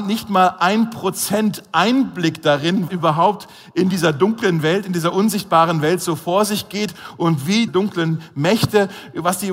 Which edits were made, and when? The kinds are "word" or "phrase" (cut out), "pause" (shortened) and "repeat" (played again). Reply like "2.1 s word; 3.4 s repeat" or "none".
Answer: 2.9 s word; 7.7 s word